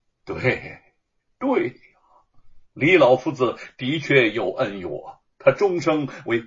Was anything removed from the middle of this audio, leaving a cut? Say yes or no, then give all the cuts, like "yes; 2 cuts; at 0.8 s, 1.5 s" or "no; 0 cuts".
yes; 2 cuts; at 2.6 s, 5.3 s